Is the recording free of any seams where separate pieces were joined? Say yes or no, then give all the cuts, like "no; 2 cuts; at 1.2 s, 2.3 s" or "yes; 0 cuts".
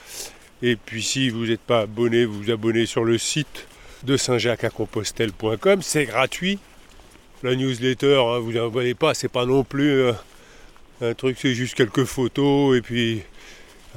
yes; 0 cuts